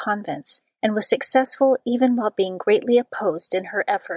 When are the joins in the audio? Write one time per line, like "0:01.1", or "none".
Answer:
none